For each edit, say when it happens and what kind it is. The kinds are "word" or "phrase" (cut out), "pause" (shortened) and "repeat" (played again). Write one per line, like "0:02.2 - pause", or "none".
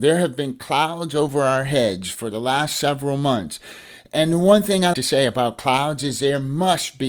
0:04.9 - word